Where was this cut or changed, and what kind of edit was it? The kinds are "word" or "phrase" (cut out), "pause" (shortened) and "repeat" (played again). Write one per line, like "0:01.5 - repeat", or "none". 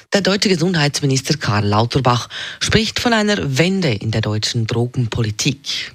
none